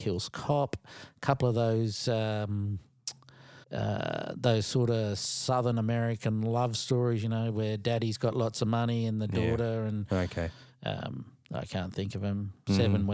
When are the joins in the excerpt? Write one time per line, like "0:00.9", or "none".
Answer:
0:03.6